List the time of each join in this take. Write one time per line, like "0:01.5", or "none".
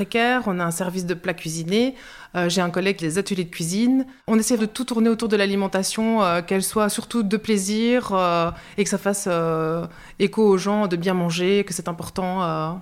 0:03.0
0:04.2
0:04.6